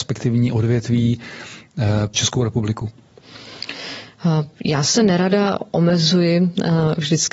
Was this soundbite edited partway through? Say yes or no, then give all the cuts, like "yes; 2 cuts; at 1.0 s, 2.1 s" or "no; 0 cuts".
yes; 2 cuts; at 2.1 s, 4.5 s